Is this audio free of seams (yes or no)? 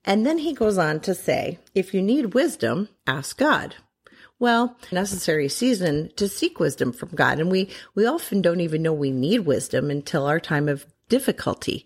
no